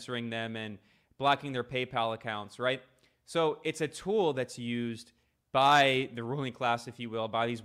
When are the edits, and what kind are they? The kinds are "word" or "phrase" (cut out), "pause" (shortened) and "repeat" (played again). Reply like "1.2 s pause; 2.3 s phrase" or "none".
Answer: none